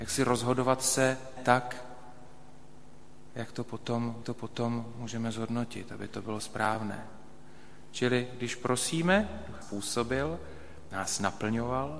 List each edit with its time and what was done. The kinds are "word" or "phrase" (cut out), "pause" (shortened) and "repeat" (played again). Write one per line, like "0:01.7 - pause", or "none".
0:01.4 - word
0:04.2 - repeat
0:09.6 - phrase
0:10.9 - word